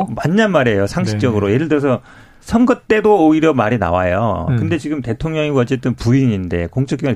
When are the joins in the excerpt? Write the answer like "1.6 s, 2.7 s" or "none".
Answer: none